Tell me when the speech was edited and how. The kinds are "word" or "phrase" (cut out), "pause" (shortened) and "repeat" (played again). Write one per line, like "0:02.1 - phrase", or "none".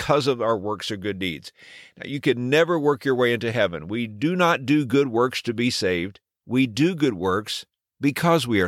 none